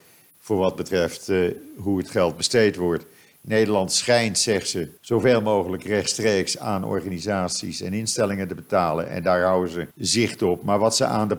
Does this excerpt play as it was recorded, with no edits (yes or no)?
no